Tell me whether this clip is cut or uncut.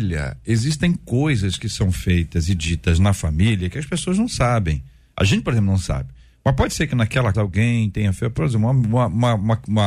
cut